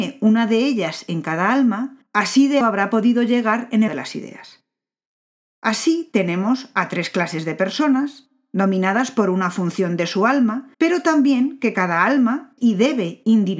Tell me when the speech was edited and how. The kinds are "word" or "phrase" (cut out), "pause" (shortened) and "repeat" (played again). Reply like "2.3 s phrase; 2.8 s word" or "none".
2.1 s pause; 2.6 s word; 3.9 s phrase; 10.7 s pause; 12.6 s phrase